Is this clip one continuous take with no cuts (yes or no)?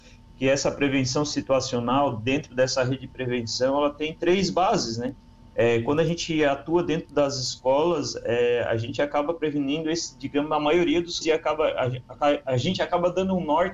no